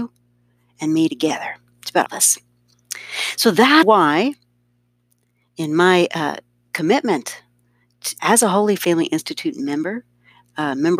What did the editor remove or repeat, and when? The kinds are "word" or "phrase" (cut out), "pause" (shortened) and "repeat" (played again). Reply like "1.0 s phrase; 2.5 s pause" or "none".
2.1 s word; 3.8 s word; 8.2 s word